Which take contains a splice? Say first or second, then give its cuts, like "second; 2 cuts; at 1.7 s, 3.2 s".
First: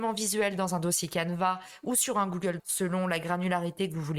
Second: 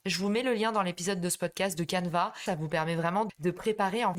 first; 1 cut; at 2.6 s